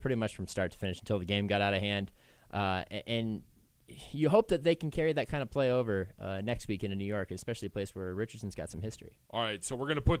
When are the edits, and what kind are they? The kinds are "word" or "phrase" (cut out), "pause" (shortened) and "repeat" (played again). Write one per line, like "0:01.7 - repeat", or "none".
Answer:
none